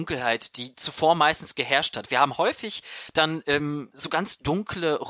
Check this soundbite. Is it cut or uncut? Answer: uncut